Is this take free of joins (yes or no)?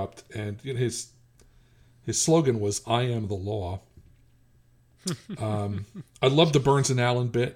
yes